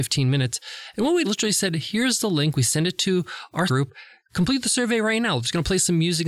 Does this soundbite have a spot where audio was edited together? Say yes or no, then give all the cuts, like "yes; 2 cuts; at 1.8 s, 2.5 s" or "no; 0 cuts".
yes; 2 cuts; at 1.2 s, 3.7 s